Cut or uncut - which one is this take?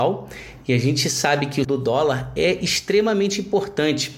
cut